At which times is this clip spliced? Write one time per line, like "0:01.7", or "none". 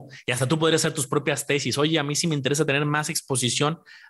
none